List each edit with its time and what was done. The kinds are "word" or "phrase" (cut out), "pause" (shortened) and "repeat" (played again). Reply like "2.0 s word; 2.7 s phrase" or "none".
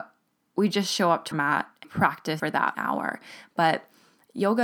1.3 s word; 1.8 s word; 2.4 s word; 2.7 s word